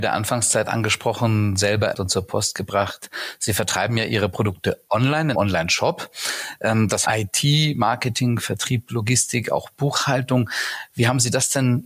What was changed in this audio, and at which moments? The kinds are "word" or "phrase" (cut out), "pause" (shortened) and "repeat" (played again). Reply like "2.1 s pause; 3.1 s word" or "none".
1.9 s phrase; 5.3 s word; 7.0 s phrase